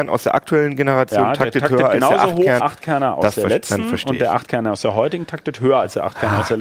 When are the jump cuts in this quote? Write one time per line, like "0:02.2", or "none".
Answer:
0:02.6